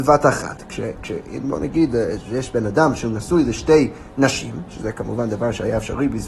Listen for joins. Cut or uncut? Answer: uncut